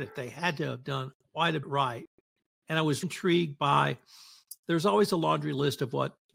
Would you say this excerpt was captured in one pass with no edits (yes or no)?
no